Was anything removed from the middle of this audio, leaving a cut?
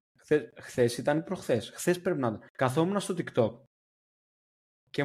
yes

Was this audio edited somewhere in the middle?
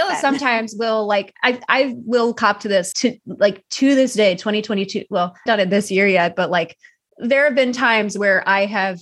yes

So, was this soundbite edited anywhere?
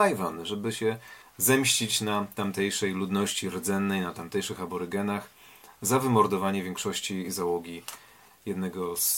yes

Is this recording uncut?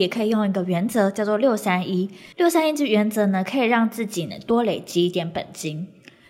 no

